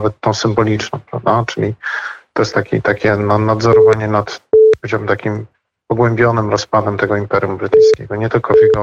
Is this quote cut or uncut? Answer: uncut